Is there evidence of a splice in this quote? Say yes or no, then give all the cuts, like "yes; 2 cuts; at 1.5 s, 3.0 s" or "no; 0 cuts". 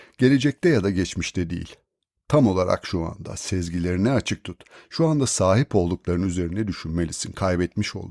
no; 0 cuts